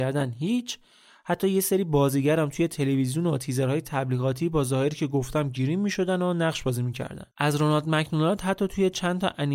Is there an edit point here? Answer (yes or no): yes